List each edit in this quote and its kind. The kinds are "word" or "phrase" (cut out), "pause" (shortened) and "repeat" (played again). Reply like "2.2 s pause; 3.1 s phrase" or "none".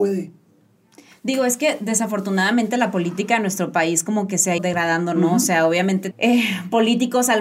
4.6 s word; 6.1 s word